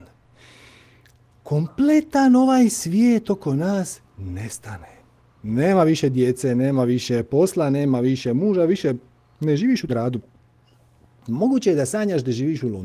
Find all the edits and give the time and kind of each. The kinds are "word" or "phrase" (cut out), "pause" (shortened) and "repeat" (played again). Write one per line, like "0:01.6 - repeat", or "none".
0:09.9 - word